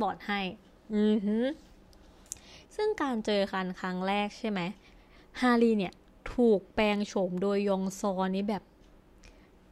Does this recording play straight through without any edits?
no; 1 cut; at 2.6 s

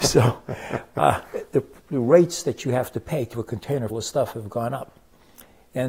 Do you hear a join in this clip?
yes; 2 cuts; at 3.3 s, 3.9 s

